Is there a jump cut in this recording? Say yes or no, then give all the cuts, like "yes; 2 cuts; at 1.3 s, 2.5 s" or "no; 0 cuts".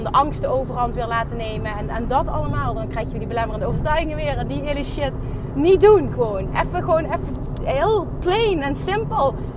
no; 0 cuts